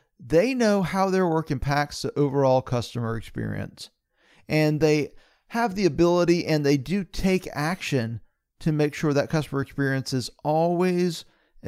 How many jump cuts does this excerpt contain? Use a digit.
0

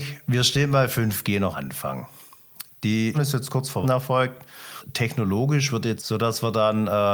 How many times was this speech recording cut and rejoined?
4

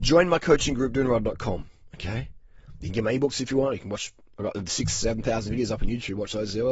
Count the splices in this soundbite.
0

